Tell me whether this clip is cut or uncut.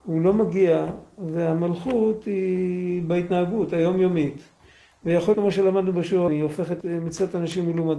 cut